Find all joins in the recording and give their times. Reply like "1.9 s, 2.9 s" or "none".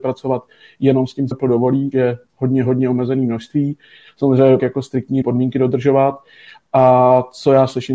1.3 s, 1.9 s, 4.6 s, 5.2 s